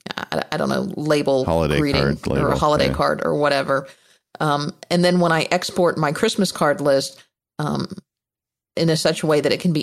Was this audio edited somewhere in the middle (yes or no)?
no